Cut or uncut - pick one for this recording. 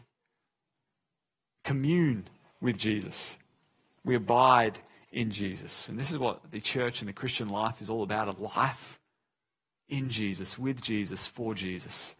uncut